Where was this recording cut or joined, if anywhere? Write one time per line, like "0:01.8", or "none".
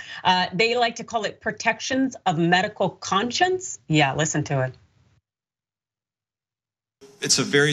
none